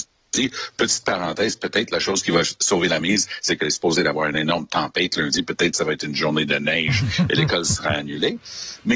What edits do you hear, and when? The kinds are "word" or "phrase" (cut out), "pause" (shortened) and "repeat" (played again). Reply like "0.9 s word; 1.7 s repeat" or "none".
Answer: none